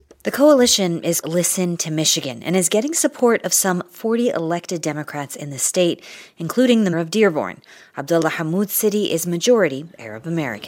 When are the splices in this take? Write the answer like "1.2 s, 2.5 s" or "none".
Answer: 1.2 s, 6.9 s

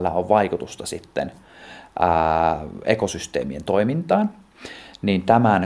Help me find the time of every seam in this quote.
none

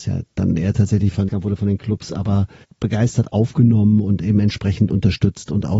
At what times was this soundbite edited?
1.3 s, 2.6 s

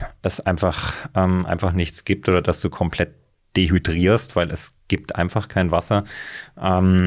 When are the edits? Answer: none

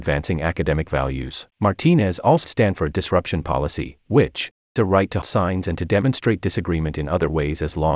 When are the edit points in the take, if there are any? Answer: 1.5 s, 2.4 s, 2.9 s, 4.8 s, 5.2 s

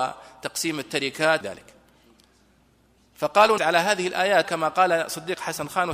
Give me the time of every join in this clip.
1.4 s, 3.6 s, 4.4 s

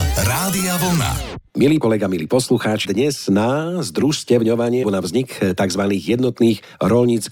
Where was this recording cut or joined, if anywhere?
1.8 s, 2.8 s, 4.8 s

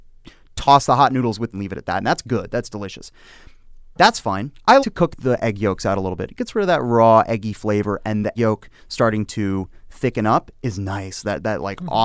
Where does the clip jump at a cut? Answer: 1.5 s, 4.8 s, 8.3 s

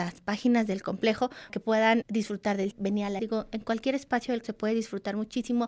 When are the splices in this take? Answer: 1.5 s, 2.0 s, 2.7 s, 3.2 s, 4.4 s

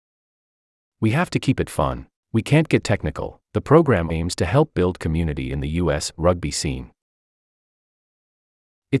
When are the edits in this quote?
2.2 s, 2.8 s, 3.4 s, 4.1 s

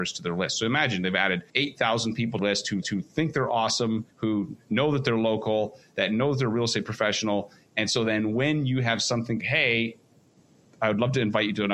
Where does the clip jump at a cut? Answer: 1.5 s, 2.4 s, 2.8 s, 4.1 s, 9.4 s

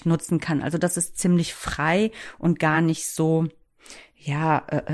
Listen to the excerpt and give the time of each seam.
none

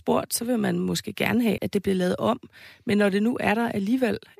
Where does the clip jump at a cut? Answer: 1.6 s

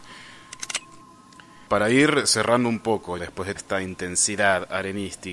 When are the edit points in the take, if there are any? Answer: 1.7 s, 3.2 s, 3.6 s

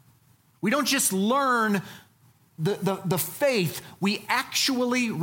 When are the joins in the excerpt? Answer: none

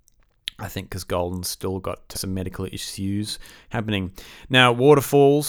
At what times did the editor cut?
2.1 s

